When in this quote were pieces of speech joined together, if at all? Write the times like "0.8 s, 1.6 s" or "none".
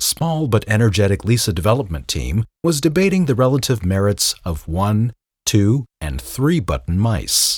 none